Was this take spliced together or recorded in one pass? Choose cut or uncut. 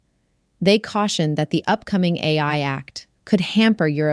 cut